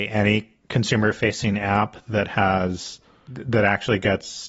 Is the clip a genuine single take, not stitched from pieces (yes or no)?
yes